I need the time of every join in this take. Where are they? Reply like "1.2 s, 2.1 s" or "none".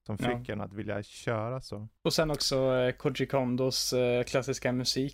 2.0 s